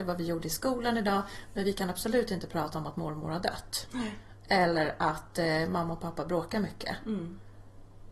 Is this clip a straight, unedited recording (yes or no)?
yes